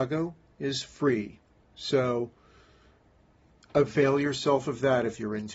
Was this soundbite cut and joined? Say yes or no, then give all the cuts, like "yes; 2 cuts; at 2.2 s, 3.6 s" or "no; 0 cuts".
no; 0 cuts